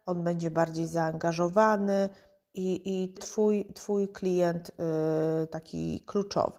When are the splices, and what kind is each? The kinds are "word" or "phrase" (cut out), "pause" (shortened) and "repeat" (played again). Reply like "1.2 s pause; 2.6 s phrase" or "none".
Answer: 3.2 s word